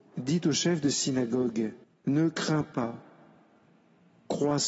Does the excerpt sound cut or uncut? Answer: cut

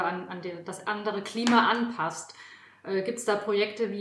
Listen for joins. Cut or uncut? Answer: uncut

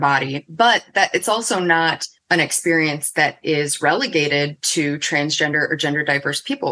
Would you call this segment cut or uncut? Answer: cut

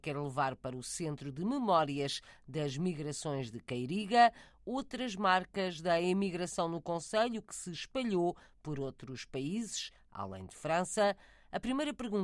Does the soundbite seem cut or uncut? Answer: uncut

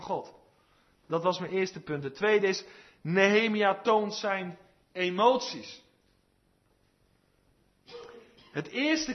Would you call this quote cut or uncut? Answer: uncut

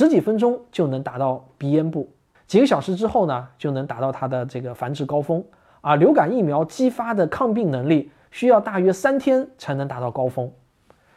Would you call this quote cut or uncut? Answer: cut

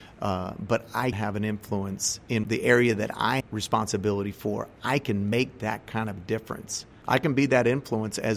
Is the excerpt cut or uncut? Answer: cut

